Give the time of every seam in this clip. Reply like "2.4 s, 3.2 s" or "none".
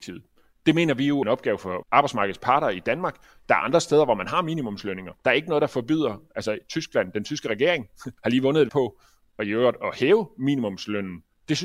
1.2 s, 1.8 s, 5.2 s, 8.2 s, 8.7 s